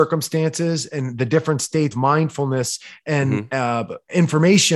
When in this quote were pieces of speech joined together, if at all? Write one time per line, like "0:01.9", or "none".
0:01.9